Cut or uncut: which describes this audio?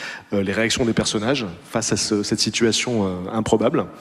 uncut